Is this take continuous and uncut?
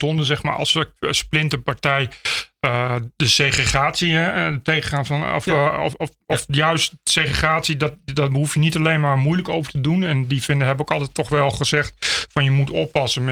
no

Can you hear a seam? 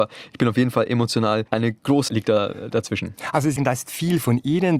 yes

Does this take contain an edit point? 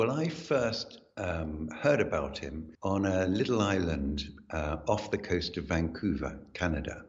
yes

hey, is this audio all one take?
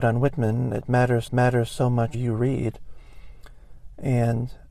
no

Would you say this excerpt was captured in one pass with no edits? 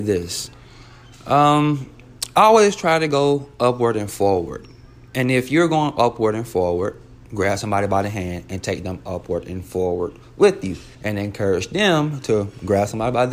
no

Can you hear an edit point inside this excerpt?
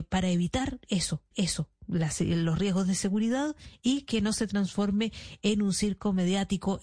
yes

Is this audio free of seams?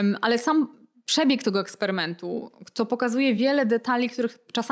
yes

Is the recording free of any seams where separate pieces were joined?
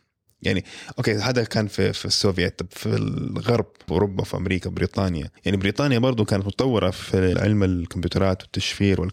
no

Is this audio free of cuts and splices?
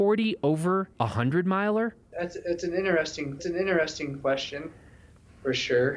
no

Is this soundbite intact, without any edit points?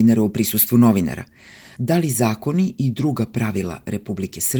yes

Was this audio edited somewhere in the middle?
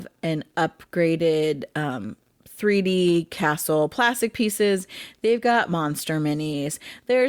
no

